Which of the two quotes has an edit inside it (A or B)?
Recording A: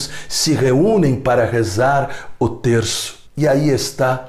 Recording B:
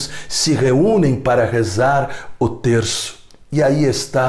A